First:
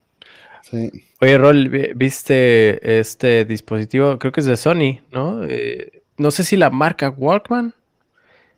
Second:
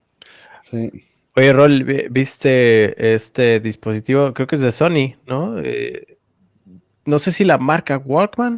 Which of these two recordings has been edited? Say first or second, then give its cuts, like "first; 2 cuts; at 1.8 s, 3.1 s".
first; 2 cuts; at 1.1 s, 6.1 s